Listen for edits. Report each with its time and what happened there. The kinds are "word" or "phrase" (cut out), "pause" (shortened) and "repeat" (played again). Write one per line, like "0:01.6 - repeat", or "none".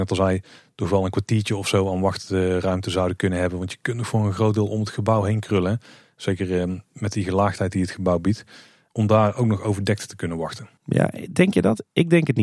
0:10.8 - pause